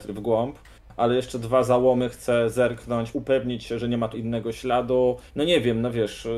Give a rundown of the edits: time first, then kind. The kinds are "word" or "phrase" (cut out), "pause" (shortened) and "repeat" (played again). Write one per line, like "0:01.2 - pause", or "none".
0:03.1 - word
0:04.1 - word
0:05.3 - pause